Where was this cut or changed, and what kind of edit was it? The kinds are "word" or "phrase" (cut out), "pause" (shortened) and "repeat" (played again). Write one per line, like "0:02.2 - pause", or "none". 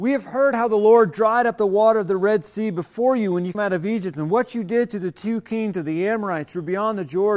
0:03.5 - word